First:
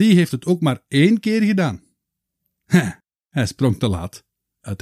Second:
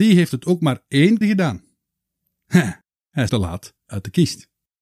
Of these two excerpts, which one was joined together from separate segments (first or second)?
second